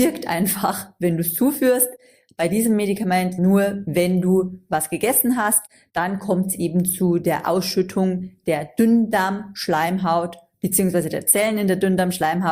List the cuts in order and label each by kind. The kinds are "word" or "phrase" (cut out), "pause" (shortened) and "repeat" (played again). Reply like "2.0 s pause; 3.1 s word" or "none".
3.4 s word